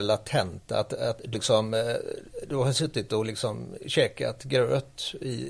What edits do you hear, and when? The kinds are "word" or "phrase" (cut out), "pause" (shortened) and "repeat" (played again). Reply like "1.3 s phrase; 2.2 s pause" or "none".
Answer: 1.3 s word